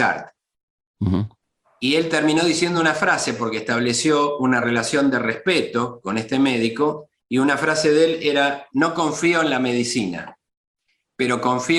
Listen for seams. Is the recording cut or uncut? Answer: uncut